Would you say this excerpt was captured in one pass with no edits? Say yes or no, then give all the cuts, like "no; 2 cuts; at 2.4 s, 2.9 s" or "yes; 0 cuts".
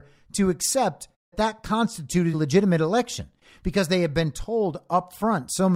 no; 2 cuts; at 1.3 s, 2.3 s